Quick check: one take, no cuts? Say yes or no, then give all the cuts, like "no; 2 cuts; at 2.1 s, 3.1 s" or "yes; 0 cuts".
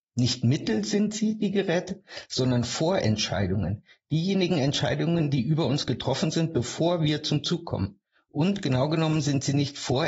yes; 0 cuts